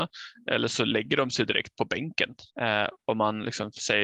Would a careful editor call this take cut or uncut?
cut